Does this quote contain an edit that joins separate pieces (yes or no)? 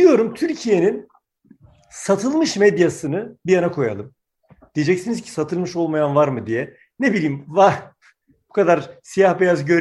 no